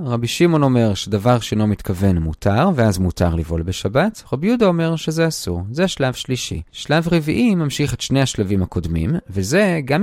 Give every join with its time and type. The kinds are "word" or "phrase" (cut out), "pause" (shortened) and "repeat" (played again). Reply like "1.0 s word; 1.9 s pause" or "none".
6.7 s pause